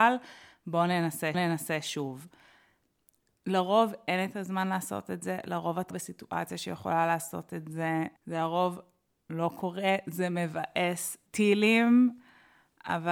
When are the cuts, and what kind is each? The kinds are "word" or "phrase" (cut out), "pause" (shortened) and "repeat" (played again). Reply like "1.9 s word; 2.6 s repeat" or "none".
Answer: 1.3 s repeat; 5.9 s word; 8.2 s pause; 11.3 s pause